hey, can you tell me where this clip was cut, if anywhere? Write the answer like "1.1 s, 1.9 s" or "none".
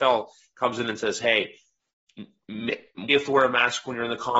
3.1 s